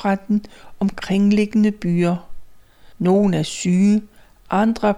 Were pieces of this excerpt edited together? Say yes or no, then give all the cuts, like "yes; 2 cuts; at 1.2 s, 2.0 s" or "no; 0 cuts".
yes; 1 cut; at 2.9 s